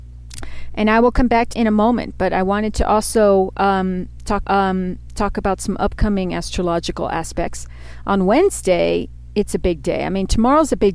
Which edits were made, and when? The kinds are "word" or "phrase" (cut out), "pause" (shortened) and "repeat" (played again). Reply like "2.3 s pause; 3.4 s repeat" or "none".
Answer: 1.5 s word; 4.4 s repeat